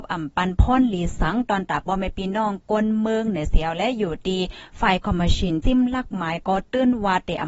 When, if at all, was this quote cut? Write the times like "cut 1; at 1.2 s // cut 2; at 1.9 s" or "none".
cut 1; at 5.6 s